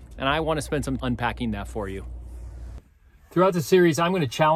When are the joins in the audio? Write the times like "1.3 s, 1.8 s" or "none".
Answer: 1.0 s